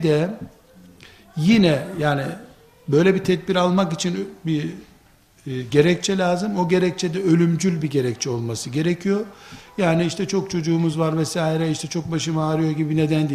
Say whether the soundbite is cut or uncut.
uncut